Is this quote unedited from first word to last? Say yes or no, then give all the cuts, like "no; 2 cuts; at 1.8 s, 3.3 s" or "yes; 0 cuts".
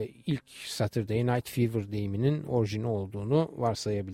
yes; 0 cuts